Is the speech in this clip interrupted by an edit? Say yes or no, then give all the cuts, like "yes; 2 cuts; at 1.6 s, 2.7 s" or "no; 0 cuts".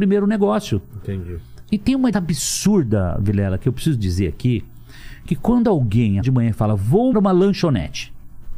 yes; 3 cuts; at 2.1 s, 6.2 s, 7.1 s